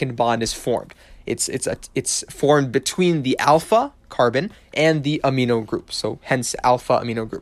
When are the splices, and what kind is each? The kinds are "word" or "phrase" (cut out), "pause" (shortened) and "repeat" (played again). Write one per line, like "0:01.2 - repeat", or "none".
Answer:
none